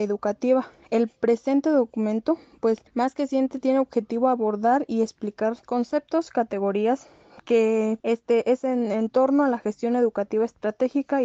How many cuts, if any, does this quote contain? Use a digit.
3